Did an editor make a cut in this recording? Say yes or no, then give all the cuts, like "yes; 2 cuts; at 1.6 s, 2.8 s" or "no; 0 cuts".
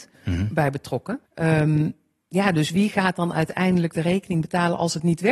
yes; 1 cut; at 1.3 s